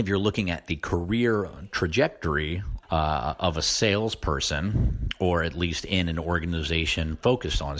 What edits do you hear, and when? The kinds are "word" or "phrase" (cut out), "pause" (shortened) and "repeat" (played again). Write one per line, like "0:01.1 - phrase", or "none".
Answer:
0:02.8 - word